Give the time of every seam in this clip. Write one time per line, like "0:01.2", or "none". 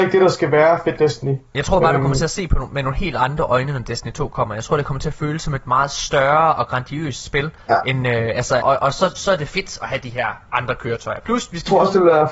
0:01.0
0:08.6